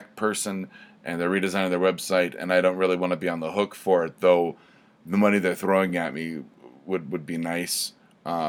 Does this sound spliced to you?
no; 0 cuts

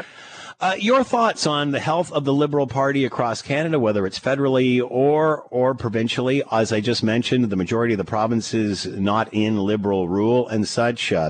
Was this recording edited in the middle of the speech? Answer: no; 0 cuts

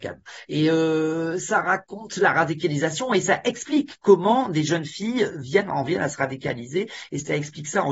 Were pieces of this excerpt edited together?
no; 0 cuts

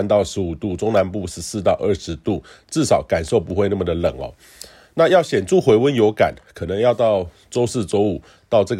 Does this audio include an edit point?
no; 0 cuts

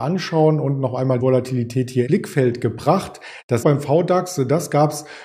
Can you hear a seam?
yes; 3 cuts; at 1.2 s, 2.1 s, 3.6 s

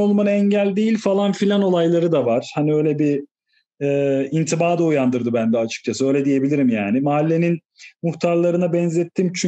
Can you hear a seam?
no; 0 cuts

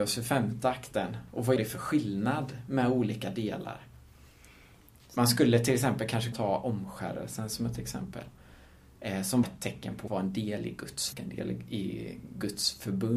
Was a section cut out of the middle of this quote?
yes; 5 cuts; at 1.6 s, 6.3 s, 9.4 s, 10.1 s, 11.1 s

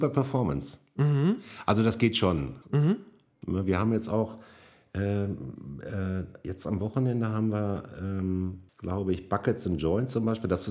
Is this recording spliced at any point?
yes; 2 cuts; at 2.6 s, 8.7 s

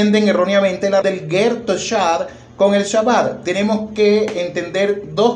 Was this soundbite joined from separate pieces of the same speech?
yes; 1 cut; at 1.0 s

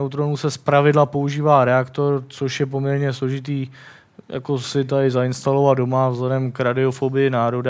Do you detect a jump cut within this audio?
no; 0 cuts

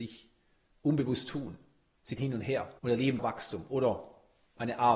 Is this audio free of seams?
no; 3 cuts; at 2.2 s, 2.8 s, 3.2 s

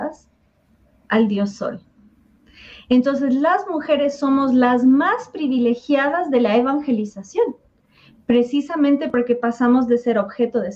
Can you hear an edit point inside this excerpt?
no; 0 cuts

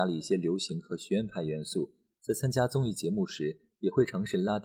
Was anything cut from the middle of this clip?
no; 0 cuts

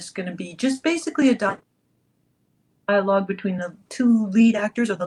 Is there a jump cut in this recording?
no; 0 cuts

